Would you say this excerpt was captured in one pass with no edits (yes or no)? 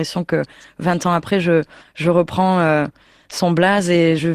yes